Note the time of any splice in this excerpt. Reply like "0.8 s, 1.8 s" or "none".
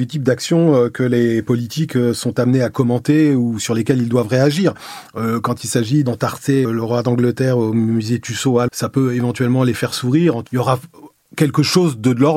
6.7 s, 8.7 s, 10.5 s